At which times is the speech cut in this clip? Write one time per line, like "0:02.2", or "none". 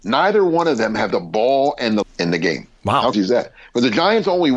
0:01.1
0:02.0
0:03.1